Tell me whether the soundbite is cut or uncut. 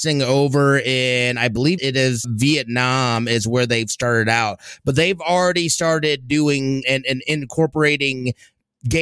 cut